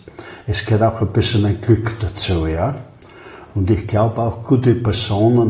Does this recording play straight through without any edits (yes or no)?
yes